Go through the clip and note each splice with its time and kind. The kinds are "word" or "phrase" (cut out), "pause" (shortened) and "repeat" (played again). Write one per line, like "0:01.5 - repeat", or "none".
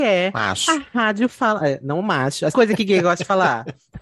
0:02.5 - word